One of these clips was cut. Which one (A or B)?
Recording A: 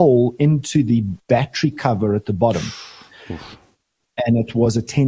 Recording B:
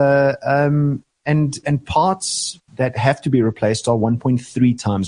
B